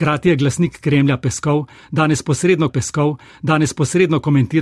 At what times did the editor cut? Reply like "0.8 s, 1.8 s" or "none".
2.7 s